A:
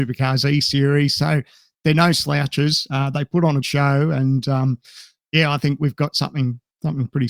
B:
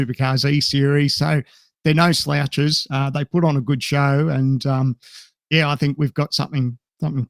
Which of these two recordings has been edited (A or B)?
A